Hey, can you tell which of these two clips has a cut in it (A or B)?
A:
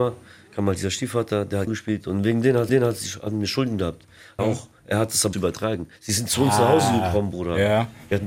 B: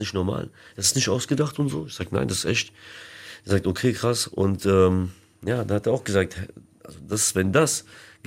A